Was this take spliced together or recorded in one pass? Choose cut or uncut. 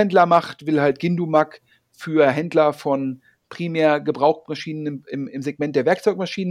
uncut